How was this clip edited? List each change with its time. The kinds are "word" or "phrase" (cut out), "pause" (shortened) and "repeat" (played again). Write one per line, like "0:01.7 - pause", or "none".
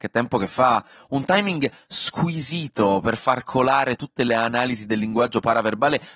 0:04.3 - phrase